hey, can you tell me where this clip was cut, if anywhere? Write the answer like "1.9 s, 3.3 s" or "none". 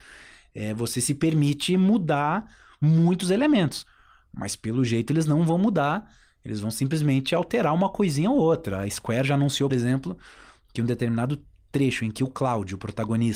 9.7 s